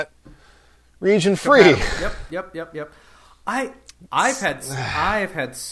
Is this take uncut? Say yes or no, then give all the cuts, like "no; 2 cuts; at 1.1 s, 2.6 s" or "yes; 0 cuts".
yes; 0 cuts